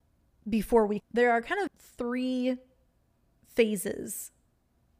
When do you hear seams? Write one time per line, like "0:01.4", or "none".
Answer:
0:01.0
0:01.7